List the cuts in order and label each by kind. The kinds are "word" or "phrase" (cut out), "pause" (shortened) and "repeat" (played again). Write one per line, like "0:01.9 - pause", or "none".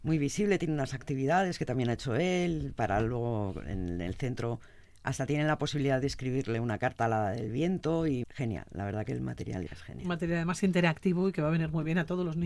0:08.2 - word
0:09.7 - word